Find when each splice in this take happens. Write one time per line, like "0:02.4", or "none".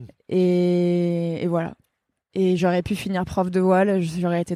none

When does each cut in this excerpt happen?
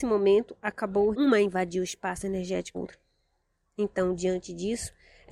0:01.1
0:02.7

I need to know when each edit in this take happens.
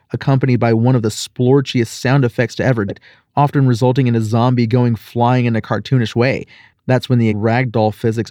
0:02.9
0:07.3

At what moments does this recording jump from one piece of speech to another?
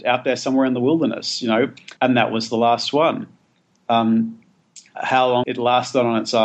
0:02.0
0:04.9
0:05.4

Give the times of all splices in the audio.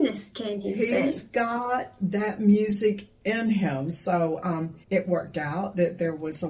0:04.8

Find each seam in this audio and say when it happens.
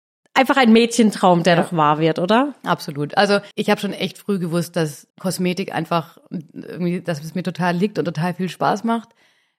0:03.5
0:05.1

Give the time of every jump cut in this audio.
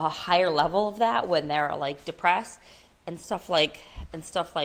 none

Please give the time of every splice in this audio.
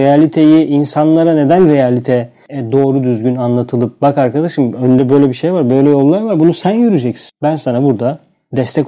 none

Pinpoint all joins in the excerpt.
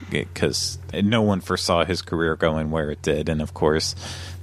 0:00.9

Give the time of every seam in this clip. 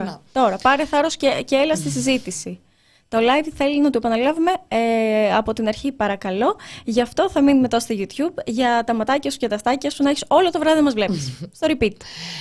none

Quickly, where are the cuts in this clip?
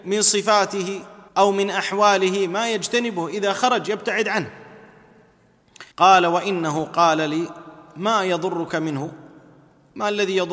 0:01.3
0:05.9

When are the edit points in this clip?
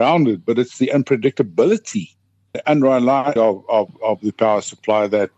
0:02.5
0:03.4

